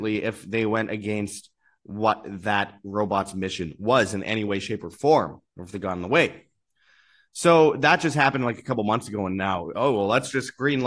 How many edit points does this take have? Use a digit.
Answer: 1